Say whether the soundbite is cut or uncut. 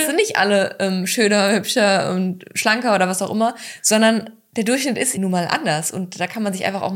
cut